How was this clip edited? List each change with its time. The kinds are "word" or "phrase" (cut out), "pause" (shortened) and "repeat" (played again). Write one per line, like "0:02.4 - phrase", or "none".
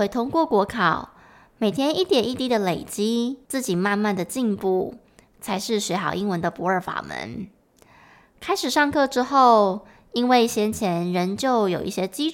0:03.4 - pause